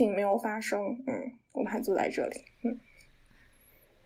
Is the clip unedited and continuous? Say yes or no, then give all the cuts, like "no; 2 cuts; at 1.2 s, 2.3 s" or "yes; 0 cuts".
yes; 0 cuts